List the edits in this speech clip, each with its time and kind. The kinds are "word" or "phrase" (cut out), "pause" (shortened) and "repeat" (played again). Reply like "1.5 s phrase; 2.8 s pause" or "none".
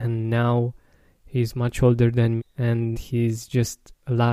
2.4 s word; 2.9 s phrase

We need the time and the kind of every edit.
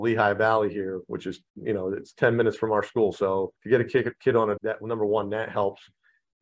1.5 s pause; 3.6 s pause; 4.6 s phrase

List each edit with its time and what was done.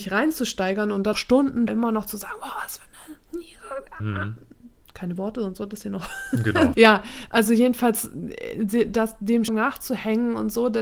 1.1 s word; 1.7 s word; 4.0 s word; 5.2 s word; 6.7 s word; 9.5 s word

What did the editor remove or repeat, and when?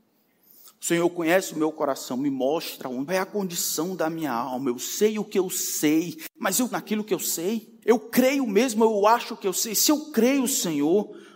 3.1 s phrase; 6.7 s word; 7.8 s pause

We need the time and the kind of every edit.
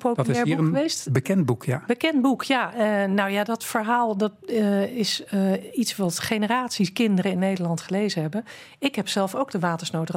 none

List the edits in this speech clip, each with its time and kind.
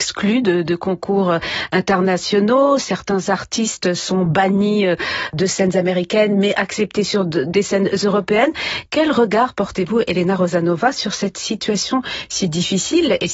none

